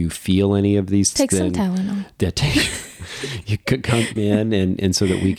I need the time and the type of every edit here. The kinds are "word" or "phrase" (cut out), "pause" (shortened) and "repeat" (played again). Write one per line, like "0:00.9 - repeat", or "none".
0:01.2 - word
0:04.2 - word